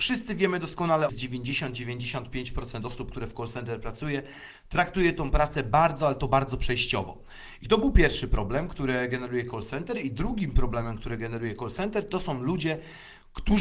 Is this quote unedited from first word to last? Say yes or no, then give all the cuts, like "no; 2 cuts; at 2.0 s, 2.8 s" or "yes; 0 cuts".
no; 1 cut; at 1.1 s